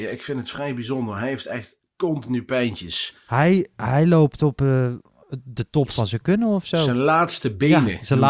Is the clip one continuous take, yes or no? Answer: yes